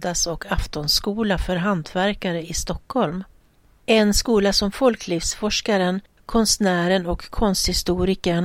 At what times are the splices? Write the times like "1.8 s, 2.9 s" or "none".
none